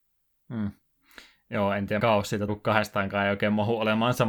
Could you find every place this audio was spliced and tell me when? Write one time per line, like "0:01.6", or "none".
0:02.0
0:02.5